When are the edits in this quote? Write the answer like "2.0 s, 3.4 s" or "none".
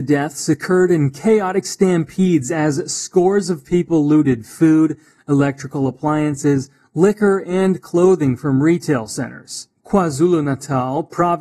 none